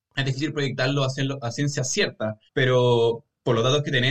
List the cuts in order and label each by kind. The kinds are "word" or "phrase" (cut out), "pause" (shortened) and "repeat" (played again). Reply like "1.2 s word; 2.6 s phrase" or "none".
2.5 s pause